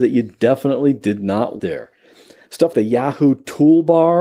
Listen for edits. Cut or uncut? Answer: cut